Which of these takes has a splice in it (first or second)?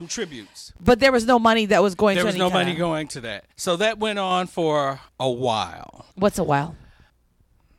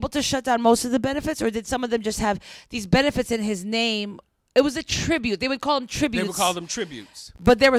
first